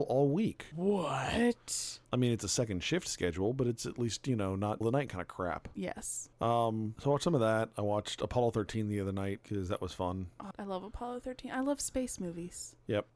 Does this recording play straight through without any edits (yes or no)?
no